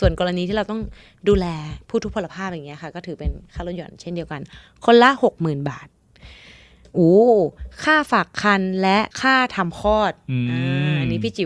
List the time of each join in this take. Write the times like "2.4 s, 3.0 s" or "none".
9.1 s